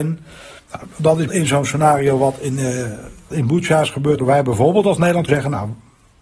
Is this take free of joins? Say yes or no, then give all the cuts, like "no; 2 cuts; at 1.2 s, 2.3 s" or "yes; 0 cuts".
no; 4 cuts; at 1.3 s, 3.3 s, 4.2 s, 5.3 s